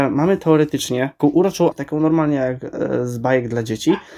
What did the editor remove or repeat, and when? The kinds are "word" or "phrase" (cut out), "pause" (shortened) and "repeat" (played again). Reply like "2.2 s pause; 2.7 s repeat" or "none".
1.2 s word; 1.7 s word